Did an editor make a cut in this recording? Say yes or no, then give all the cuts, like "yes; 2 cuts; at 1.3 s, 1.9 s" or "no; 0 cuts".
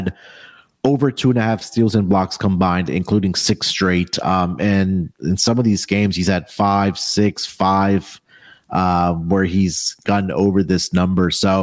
no; 0 cuts